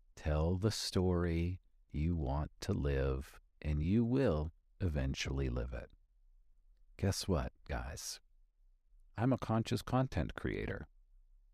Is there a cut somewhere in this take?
no; 0 cuts

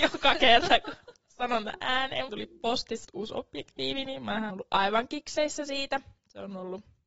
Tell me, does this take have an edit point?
yes; 3 cuts; at 2.3 s, 3.0 s, 4.5 s

